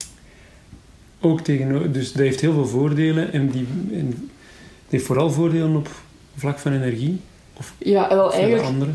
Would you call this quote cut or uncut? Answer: uncut